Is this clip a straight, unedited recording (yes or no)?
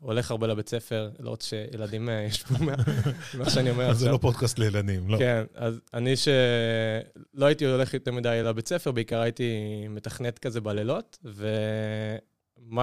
yes